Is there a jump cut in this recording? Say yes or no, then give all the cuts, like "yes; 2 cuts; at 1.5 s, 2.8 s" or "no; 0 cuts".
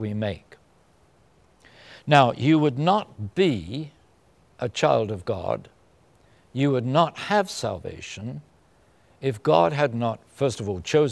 no; 0 cuts